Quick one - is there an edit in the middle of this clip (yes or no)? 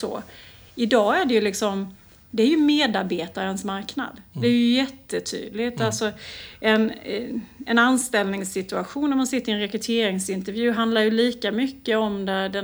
no